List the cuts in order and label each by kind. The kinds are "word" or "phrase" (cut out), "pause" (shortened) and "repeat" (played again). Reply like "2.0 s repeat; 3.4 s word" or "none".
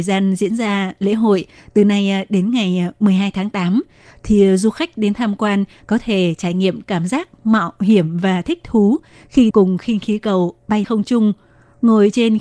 9.5 s word; 10.8 s word